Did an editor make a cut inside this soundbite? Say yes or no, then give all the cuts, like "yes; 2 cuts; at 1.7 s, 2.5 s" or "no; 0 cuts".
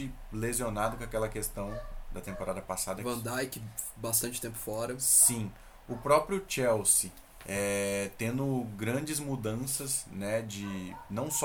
no; 0 cuts